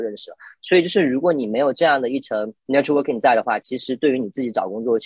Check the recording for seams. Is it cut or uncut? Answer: cut